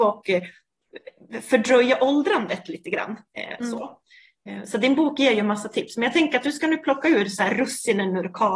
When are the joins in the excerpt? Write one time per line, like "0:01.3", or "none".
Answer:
none